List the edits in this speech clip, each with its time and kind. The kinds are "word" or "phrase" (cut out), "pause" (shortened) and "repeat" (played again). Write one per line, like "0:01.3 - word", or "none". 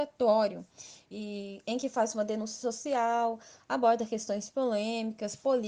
none